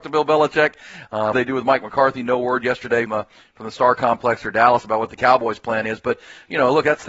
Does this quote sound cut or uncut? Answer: cut